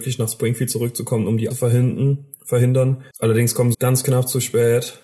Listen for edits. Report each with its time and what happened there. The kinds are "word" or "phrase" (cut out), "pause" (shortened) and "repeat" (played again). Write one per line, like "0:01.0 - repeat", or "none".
0:01.5 - phrase
0:03.1 - pause
0:03.7 - word